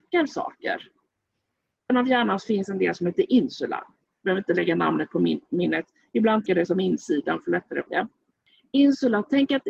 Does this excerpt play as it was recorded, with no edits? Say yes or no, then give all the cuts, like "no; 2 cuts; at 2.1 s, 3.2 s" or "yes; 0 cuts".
no; 3 cuts; at 1.9 s, 6.5 s, 7.9 s